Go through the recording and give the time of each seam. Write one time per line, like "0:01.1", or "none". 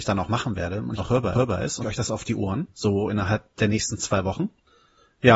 0:01.0
0:01.3
0:01.8
0:02.7
0:03.5